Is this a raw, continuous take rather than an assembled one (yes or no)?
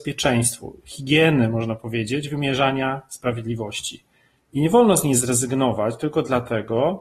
yes